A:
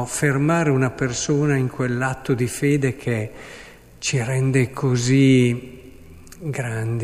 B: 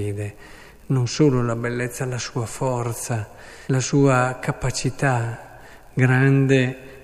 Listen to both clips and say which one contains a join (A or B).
B